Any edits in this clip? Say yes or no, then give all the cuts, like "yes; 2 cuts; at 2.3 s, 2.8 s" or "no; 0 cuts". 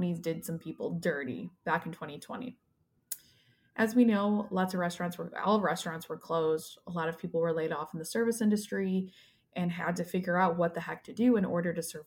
no; 0 cuts